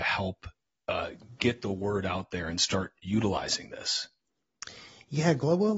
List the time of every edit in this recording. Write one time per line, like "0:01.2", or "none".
none